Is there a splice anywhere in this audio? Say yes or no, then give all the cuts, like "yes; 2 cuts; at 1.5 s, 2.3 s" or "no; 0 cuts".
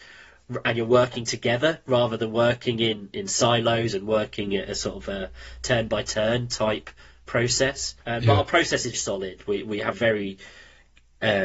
yes; 3 cuts; at 8.0 s, 8.9 s, 9.9 s